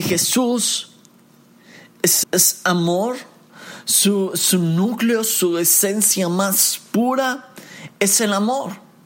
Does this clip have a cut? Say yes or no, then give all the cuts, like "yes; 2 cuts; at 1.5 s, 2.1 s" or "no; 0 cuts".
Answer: yes; 1 cut; at 2.2 s